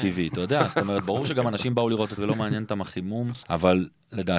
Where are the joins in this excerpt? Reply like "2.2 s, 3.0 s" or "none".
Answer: 2.2 s, 3.4 s